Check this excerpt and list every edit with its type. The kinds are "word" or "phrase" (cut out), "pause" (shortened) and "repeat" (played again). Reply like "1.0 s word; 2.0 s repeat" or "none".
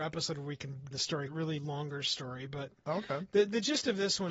0.9 s phrase; 1.3 s word; 1.6 s phrase